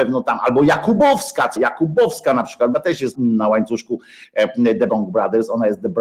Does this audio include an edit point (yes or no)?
yes